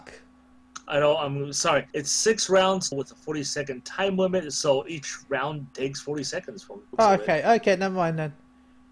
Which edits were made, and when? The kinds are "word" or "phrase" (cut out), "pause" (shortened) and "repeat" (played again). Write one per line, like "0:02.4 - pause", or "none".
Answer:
0:01.9 - pause
0:02.9 - phrase
0:06.9 - pause